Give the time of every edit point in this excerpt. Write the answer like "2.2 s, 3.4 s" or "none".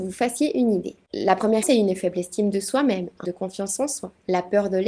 1.6 s, 3.2 s